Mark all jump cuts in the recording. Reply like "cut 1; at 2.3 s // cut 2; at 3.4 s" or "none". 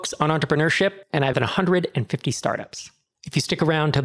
cut 1; at 1.3 s